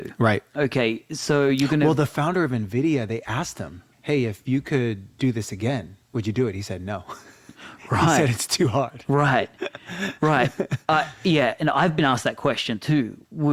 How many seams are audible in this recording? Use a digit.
2